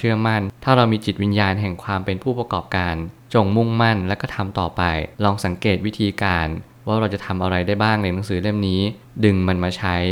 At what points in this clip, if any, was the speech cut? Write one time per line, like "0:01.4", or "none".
0:05.1